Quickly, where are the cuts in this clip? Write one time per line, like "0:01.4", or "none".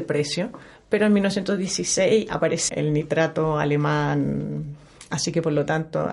0:02.7